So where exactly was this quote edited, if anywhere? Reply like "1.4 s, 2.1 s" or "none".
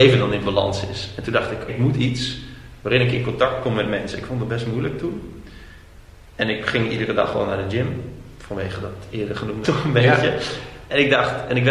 1.7 s, 9.6 s